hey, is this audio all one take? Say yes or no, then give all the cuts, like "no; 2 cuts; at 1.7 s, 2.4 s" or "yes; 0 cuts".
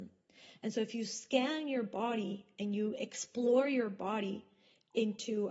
yes; 0 cuts